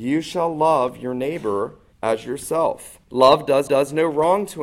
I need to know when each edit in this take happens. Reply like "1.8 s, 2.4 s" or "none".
1.9 s, 3.0 s, 3.7 s